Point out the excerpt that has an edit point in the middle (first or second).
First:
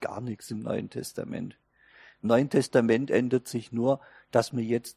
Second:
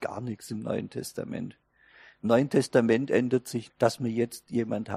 second